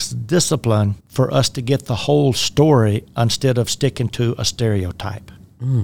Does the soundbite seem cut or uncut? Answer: cut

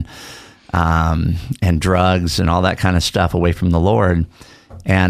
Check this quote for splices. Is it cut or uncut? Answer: uncut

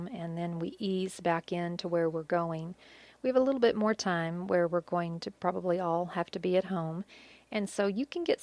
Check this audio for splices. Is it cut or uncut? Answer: uncut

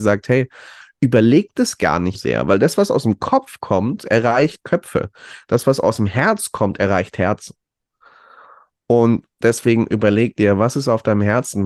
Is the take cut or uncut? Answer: cut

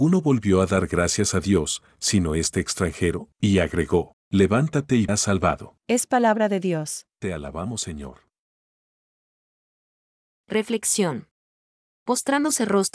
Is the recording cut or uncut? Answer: cut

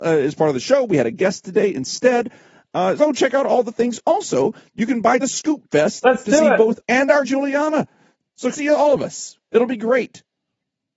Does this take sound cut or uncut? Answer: cut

